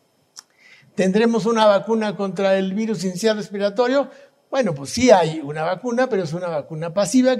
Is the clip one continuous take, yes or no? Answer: yes